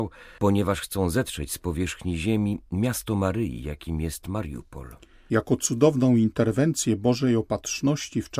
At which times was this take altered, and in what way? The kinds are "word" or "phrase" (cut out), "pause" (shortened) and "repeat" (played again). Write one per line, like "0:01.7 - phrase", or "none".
none